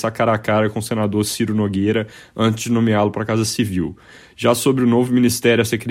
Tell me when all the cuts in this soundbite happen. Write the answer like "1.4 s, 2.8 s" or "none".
none